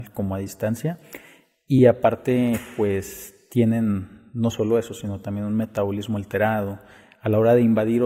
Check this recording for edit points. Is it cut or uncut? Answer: uncut